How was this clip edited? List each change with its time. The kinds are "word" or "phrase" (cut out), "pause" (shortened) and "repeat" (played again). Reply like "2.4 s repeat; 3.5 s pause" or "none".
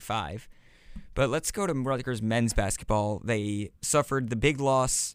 3.7 s pause